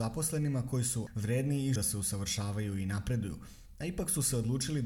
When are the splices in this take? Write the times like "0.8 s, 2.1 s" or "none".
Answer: 1.1 s, 1.8 s